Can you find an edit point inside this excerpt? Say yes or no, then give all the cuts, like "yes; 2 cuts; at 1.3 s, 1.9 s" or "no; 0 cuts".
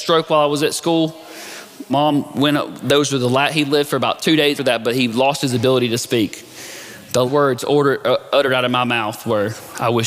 yes; 3 cuts; at 1.9 s, 4.6 s, 7.3 s